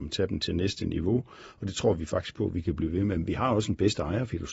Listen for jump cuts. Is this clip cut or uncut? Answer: uncut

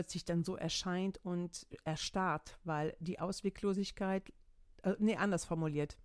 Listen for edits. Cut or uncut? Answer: uncut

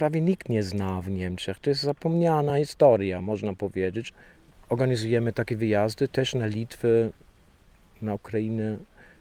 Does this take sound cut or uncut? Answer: uncut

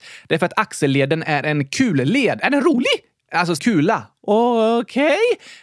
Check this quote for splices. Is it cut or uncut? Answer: cut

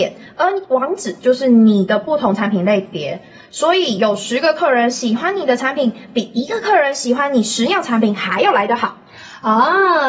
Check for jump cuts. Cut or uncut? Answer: uncut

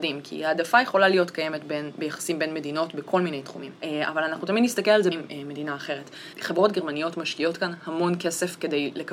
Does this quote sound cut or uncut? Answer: cut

